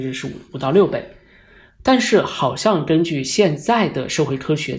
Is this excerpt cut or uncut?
uncut